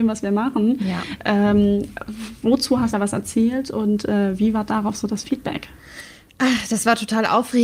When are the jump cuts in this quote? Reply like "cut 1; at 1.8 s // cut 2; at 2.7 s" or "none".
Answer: cut 1; at 2.9 s

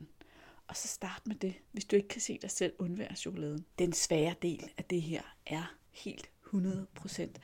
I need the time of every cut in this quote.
cut 1; at 1.6 s // cut 2; at 3.7 s

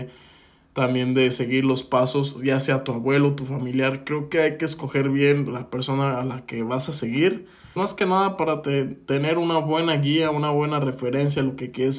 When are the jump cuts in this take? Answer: cut 1; at 7.8 s

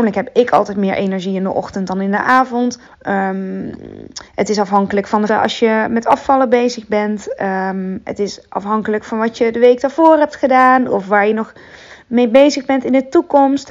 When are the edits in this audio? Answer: cut 1; at 2.9 s // cut 2; at 4.3 s // cut 3; at 5.3 s

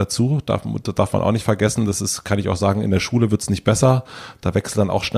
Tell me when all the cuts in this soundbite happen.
none

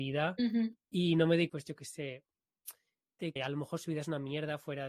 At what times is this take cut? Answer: cut 1; at 1.5 s // cut 2; at 3.4 s

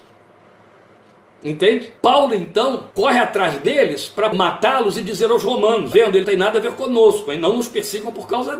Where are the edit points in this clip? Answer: cut 1; at 2.0 s // cut 2; at 2.9 s // cut 3; at 4.3 s // cut 4; at 5.9 s // cut 5; at 6.2 s

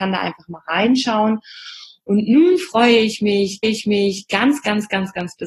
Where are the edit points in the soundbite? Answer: cut 1; at 3.6 s

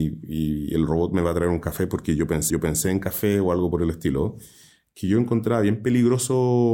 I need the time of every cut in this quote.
cut 1; at 2.5 s

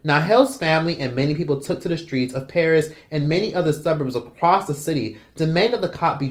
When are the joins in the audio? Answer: none

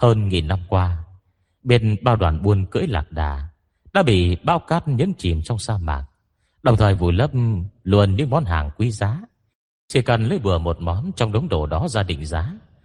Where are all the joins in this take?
none

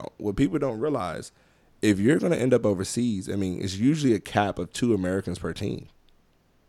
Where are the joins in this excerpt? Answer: none

